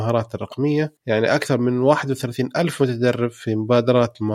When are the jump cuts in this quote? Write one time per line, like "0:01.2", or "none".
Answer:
0:01.0